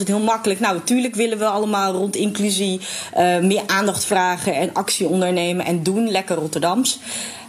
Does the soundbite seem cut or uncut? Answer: uncut